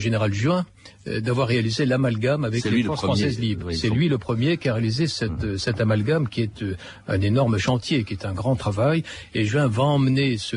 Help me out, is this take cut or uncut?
uncut